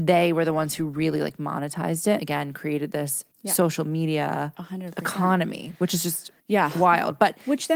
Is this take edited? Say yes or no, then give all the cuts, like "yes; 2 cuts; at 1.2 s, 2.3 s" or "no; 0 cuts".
yes; 3 cuts; at 2.2 s, 3.3 s, 6.4 s